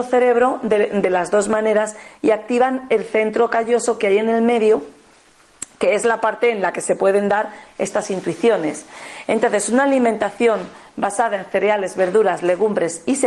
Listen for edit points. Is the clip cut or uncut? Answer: uncut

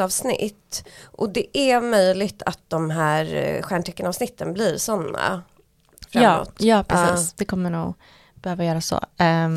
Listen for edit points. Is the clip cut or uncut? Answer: uncut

